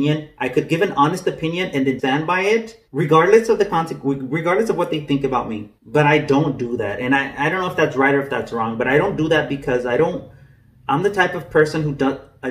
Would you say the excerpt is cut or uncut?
cut